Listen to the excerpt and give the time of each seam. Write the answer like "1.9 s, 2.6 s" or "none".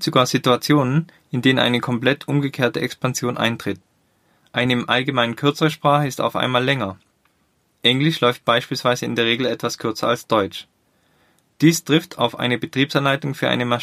none

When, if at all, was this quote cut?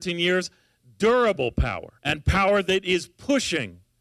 2.0 s

